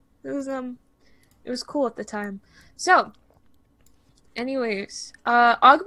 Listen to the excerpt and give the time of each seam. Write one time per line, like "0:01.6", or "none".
none

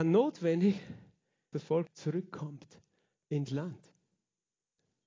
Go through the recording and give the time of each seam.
0:01.5
0:01.9
0:03.5

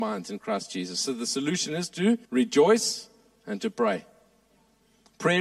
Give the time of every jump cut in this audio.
0:02.2

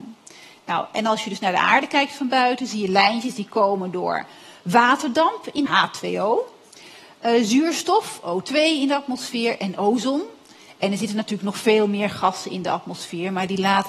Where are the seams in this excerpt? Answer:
0:05.7

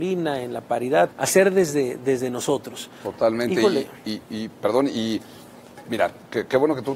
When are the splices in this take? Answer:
0:01.1

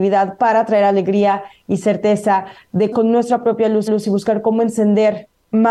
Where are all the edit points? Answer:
0:02.9
0:03.9

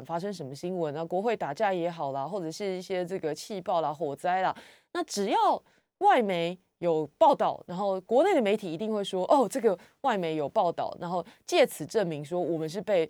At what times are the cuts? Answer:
none

